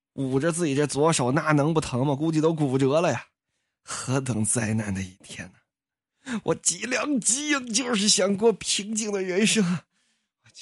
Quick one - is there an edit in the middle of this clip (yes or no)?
no